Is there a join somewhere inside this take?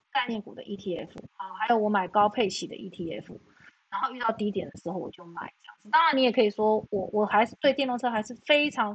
no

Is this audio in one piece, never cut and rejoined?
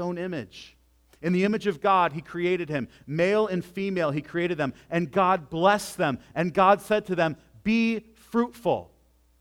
yes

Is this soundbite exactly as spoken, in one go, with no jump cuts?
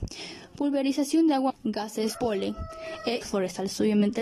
no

